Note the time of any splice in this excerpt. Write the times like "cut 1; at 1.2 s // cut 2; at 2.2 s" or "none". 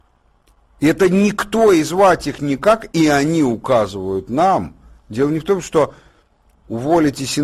none